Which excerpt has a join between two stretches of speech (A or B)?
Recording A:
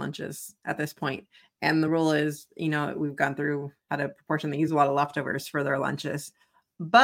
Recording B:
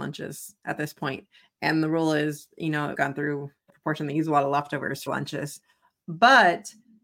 B